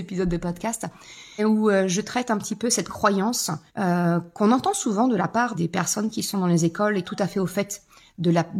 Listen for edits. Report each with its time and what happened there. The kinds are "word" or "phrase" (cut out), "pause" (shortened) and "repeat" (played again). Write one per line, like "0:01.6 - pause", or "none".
0:01.4 - word
0:03.7 - pause
0:05.5 - word
0:07.0 - phrase